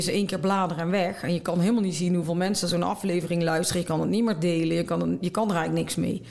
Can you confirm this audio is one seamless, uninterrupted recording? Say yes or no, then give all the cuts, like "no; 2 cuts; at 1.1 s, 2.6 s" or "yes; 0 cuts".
yes; 0 cuts